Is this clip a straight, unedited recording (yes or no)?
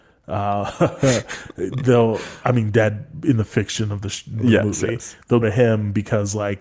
no